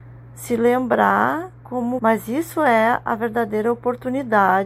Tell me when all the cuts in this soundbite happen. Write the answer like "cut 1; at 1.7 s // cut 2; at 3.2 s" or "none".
cut 1; at 2.0 s